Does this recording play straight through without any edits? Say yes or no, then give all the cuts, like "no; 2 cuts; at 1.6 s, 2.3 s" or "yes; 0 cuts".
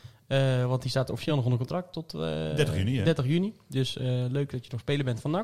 yes; 0 cuts